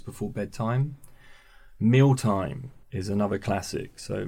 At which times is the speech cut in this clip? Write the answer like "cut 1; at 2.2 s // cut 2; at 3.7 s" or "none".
cut 1; at 2.8 s

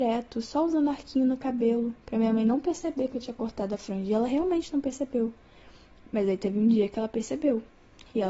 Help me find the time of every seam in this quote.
none

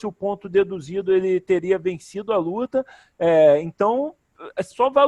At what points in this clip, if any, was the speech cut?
none

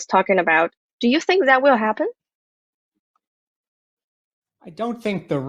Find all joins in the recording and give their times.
none

